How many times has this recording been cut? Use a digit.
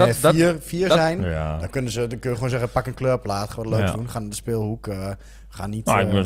0